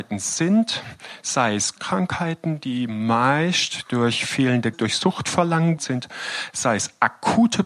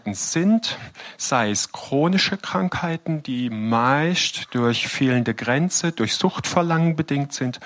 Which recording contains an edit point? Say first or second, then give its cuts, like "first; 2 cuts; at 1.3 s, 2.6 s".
first; 3 cuts; at 1.8 s, 4.7 s, 5.8 s